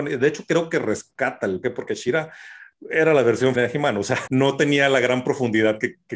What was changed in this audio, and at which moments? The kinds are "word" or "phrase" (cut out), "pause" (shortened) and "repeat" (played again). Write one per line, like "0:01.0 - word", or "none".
0:01.6 - word
0:03.5 - word
0:04.3 - word